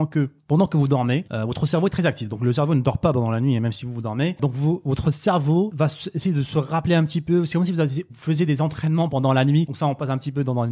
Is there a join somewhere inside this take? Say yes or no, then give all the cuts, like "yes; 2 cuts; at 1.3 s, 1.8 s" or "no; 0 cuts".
no; 0 cuts